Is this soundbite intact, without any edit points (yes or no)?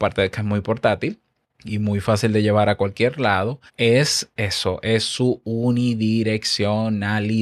no